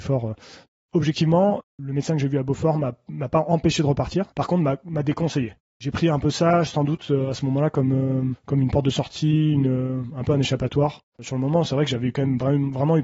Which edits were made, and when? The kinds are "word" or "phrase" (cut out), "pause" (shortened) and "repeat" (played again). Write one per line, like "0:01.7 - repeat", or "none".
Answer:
0:04.3 - pause